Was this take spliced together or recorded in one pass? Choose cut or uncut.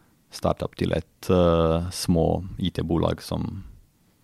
uncut